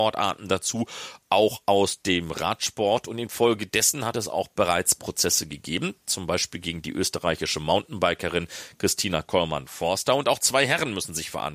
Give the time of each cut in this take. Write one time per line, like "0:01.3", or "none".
none